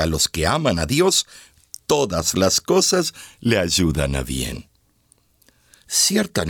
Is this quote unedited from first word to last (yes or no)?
yes